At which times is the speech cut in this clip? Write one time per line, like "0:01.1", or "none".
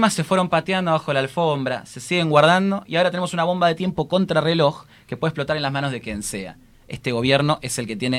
none